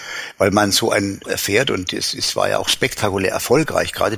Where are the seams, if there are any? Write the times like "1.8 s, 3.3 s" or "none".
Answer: 1.2 s